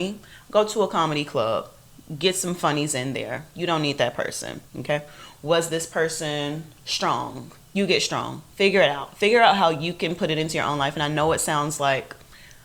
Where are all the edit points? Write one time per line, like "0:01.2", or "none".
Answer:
0:04.7
0:07.6
0:08.5